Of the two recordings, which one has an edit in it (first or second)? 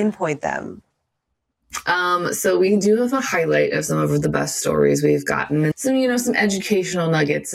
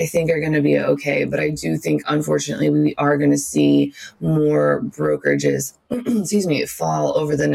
first